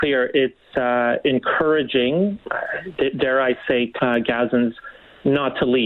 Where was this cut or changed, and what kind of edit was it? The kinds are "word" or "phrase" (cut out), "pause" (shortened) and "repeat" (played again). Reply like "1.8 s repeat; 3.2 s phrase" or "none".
4.0 s word

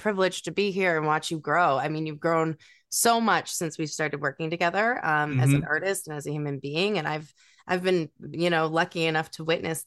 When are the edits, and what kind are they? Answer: none

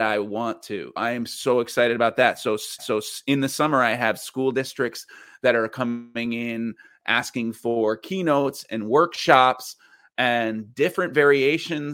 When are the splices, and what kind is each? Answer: 1.0 s word; 2.8 s repeat

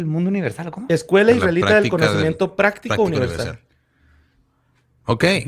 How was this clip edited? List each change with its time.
none

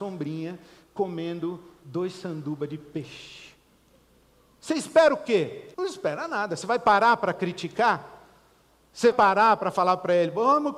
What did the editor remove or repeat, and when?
5.7 s pause; 9.1 s word

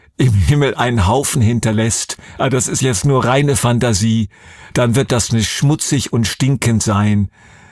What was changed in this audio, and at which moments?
none

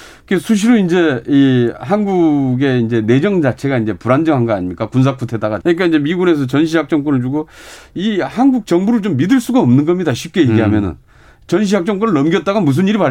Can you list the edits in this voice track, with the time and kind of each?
5.6 s phrase

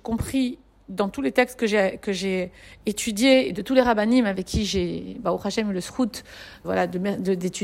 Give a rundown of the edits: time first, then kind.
6.6 s word

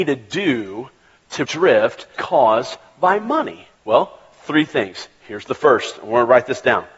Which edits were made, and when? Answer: 1.5 s word; 2.1 s word; 3.8 s pause

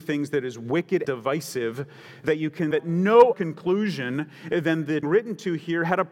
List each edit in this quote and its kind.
1.0 s word; 2.7 s word; 3.3 s word; 5.0 s phrase

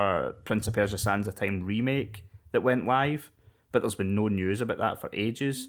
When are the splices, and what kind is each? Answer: none

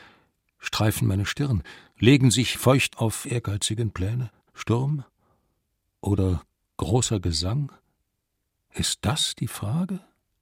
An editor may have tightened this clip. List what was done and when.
2.5 s word; 2.9 s word; 3.2 s word; 4.4 s pause

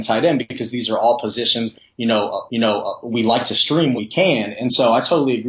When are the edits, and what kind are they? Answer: 1.7 s word; 2.5 s repeat; 4.0 s word

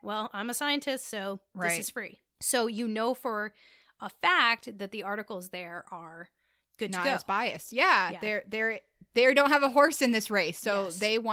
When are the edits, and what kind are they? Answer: none

